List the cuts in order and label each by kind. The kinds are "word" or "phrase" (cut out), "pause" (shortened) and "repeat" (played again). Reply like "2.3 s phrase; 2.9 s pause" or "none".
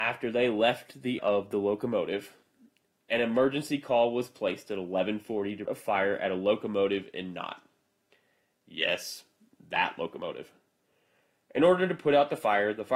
1.2 s word; 5.7 s word